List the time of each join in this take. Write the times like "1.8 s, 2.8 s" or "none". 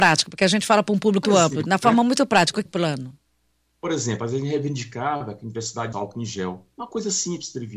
1.2 s, 2.7 s, 5.9 s